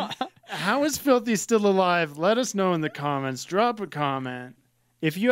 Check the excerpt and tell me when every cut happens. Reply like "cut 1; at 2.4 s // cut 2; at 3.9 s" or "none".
none